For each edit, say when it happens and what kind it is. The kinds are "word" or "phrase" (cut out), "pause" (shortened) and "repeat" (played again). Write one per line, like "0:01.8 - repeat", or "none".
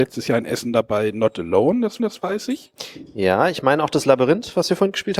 0:02.0 - repeat